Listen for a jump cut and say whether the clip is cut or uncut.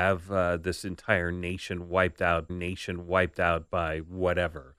cut